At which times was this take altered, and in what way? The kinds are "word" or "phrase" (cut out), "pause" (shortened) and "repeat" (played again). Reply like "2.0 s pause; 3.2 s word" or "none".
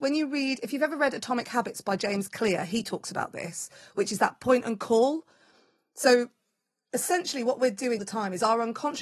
8.0 s word